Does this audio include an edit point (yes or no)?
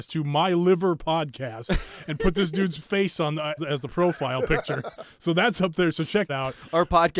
yes